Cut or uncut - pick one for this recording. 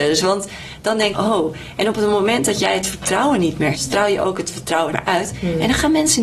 cut